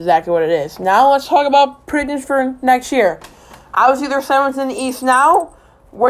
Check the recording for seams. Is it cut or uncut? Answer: uncut